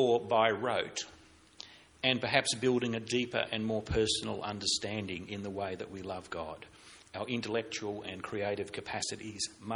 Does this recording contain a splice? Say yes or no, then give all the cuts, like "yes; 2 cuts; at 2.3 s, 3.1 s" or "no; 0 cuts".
no; 0 cuts